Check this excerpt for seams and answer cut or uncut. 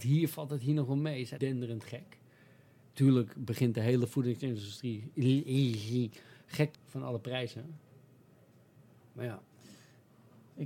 cut